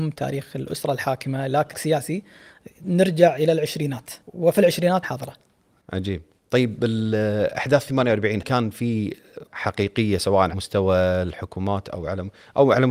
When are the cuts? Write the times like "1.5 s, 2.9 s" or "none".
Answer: 1.7 s, 4.2 s, 5.0 s, 6.4 s, 8.4 s, 9.5 s, 10.5 s